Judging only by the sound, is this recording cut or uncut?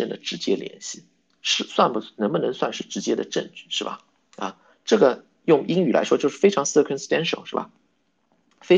uncut